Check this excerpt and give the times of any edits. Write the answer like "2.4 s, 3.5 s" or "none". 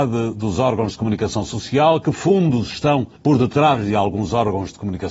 3.1 s